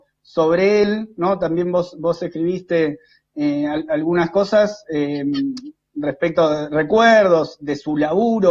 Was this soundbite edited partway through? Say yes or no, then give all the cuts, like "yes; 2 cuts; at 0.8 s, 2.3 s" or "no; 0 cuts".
no; 0 cuts